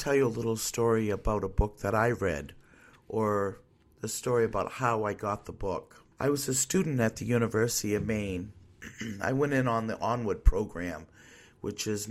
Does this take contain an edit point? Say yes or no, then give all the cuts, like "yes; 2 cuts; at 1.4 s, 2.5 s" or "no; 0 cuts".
yes; 1 cut; at 6.1 s